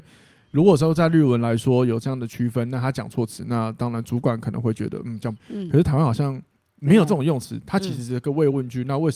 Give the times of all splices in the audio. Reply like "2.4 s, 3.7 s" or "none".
5.4 s